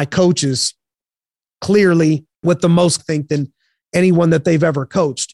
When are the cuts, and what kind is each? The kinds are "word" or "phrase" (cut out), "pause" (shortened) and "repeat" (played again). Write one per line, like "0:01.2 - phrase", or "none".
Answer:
0:02.3 - pause
0:03.0 - phrase